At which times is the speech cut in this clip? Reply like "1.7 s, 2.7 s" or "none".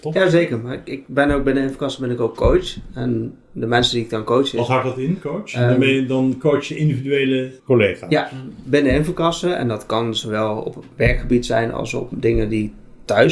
7.6 s